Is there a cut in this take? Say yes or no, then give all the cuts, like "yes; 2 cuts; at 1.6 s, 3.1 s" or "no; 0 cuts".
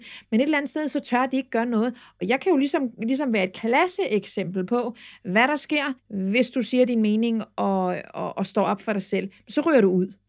yes; 1 cut; at 6.0 s